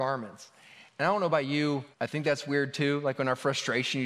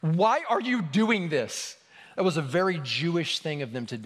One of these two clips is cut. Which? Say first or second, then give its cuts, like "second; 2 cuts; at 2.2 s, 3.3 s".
first; 1 cut; at 1.9 s